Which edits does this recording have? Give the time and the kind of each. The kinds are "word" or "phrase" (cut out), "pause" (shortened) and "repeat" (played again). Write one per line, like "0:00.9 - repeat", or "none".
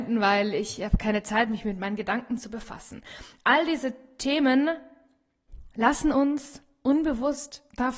none